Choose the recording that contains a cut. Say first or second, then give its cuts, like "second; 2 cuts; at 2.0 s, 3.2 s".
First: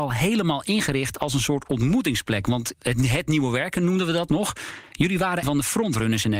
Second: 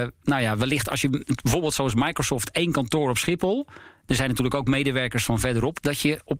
first; 3 cuts; at 2.7 s, 4.3 s, 5.4 s